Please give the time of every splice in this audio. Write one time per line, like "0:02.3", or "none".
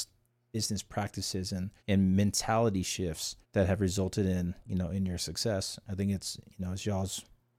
0:01.8
0:03.4

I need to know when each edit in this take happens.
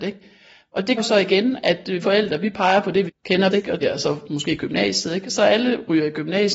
0:01.0
0:02.0
0:03.1
0:03.5
0:03.8

